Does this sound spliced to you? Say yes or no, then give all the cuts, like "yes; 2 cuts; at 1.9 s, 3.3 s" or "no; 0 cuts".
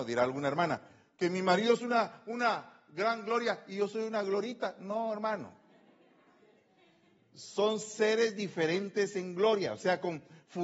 no; 0 cuts